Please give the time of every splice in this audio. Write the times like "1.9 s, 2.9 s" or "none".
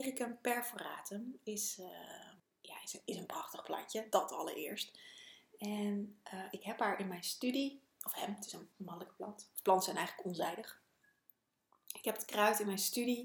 2.4 s, 8.7 s